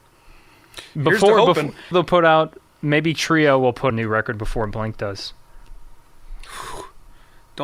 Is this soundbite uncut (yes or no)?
no